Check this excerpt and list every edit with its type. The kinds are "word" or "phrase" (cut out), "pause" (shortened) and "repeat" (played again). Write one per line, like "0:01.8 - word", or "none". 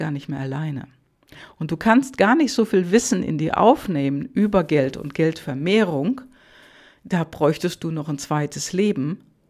none